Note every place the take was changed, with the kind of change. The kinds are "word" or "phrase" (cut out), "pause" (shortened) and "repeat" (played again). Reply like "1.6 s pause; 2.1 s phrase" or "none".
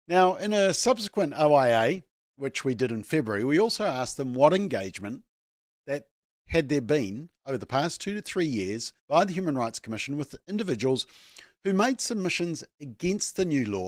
9.0 s pause